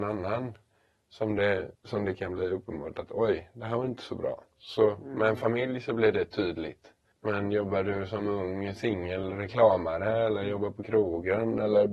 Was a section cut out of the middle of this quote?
yes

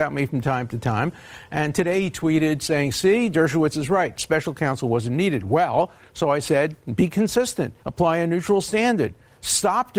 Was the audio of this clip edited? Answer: yes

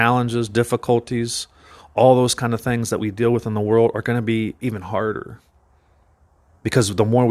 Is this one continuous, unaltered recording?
yes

